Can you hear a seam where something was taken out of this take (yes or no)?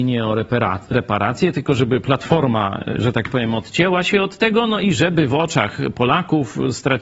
no